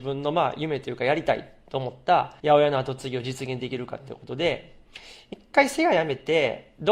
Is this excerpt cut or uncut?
cut